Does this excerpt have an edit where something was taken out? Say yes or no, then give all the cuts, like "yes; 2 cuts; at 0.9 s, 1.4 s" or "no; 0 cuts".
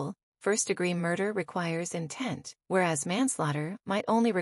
yes; 1 cut; at 2.6 s